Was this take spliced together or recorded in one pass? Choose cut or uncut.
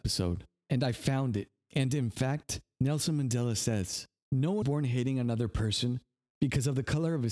cut